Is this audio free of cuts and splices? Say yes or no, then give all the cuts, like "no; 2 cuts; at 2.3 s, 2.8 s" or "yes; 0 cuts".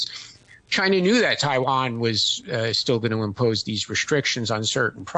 yes; 0 cuts